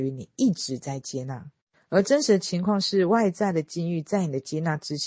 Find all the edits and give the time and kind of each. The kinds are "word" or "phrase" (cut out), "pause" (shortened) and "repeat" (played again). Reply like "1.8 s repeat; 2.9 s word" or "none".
none